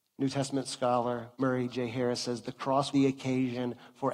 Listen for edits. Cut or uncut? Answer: cut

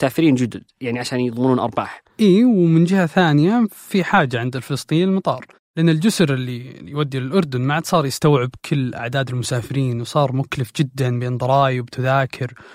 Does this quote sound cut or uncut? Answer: uncut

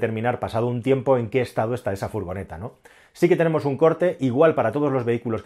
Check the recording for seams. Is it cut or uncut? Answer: uncut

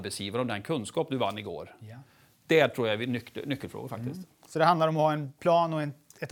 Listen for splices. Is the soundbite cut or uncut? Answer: uncut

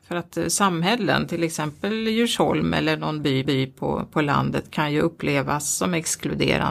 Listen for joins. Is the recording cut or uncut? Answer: cut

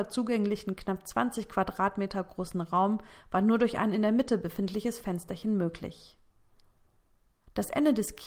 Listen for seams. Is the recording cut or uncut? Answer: uncut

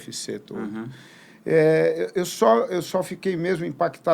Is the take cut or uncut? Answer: uncut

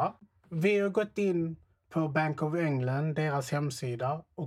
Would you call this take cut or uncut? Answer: uncut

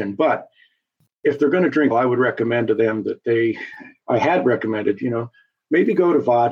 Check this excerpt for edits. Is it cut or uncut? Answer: cut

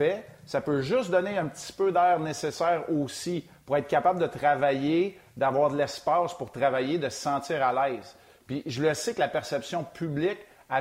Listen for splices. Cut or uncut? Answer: uncut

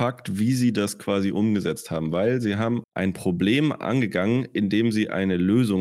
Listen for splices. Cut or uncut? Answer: cut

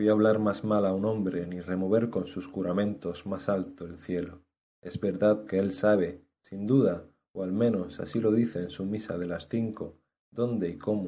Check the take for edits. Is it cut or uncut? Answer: cut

